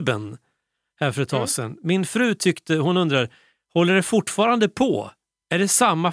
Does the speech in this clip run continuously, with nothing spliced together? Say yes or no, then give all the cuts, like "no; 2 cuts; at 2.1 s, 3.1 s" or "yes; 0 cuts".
yes; 0 cuts